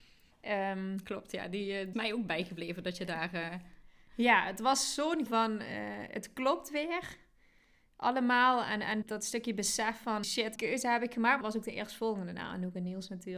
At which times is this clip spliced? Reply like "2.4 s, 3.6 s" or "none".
1.9 s, 5.3 s, 9.0 s, 10.2 s, 10.6 s, 11.4 s

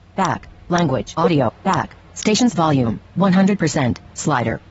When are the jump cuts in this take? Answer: 1.1 s, 1.5 s, 3.1 s

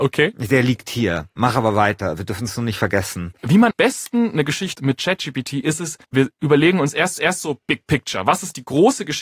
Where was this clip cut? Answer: 3.7 s, 4.7 s, 6.0 s, 7.2 s

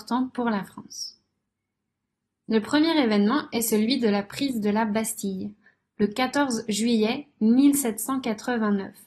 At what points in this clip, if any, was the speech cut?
none

